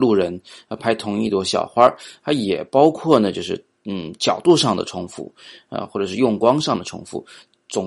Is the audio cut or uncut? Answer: uncut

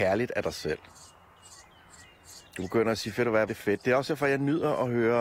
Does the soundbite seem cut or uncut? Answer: cut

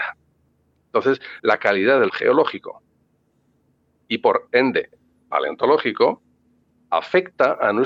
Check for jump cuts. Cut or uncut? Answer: cut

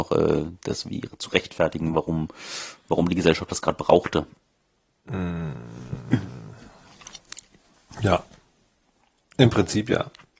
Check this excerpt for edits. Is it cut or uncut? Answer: uncut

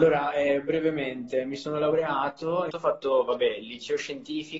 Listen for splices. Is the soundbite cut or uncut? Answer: cut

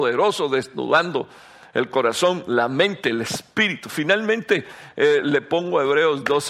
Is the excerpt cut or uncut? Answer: uncut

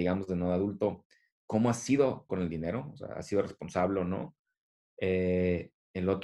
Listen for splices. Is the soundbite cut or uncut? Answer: cut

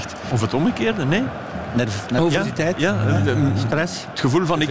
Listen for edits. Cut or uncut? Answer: uncut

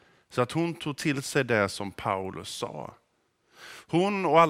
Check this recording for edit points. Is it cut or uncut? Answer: uncut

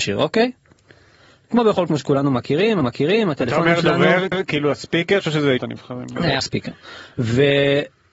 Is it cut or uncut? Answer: cut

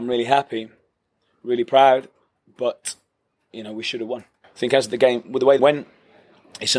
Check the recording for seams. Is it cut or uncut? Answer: cut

